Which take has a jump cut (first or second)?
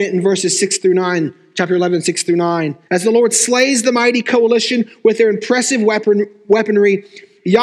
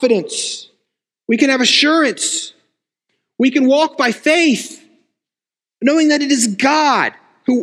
first